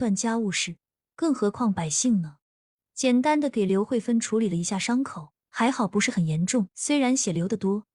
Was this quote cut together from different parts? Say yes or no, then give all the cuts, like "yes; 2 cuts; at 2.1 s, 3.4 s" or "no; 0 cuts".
yes; 3 cuts; at 2.4 s, 5.4 s, 6.7 s